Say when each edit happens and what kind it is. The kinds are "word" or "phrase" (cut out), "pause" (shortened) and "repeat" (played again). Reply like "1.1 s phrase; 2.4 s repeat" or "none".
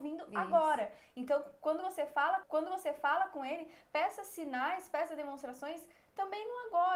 2.4 s repeat